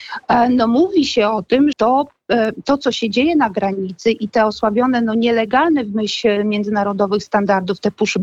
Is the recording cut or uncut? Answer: cut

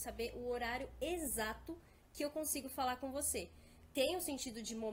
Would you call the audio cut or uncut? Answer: uncut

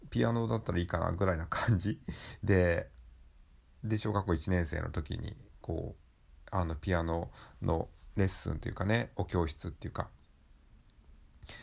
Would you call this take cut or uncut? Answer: uncut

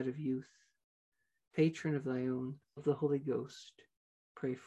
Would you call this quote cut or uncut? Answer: cut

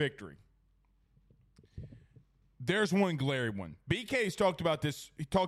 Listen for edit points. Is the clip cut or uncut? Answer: uncut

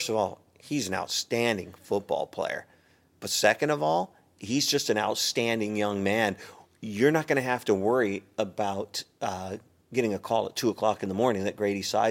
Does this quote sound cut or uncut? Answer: uncut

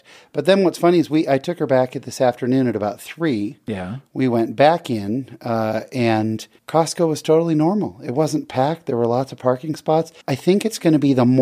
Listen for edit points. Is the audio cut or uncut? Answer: cut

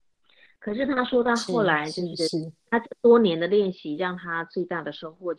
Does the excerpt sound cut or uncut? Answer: cut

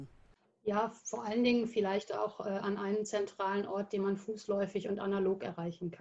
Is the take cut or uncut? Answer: uncut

